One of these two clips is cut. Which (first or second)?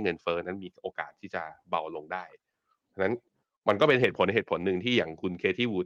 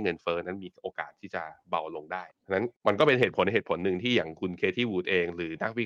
second